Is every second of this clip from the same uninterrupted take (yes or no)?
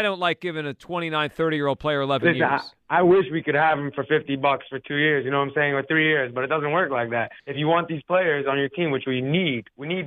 no